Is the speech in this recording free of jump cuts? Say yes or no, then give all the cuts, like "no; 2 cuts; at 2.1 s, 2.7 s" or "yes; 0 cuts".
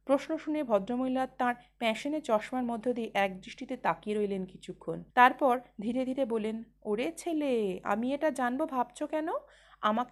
no; 1 cut; at 5.1 s